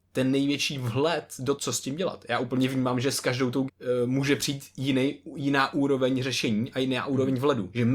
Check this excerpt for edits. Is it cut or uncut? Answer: cut